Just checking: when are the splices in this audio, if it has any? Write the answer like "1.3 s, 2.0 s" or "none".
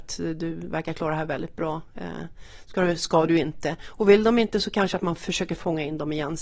none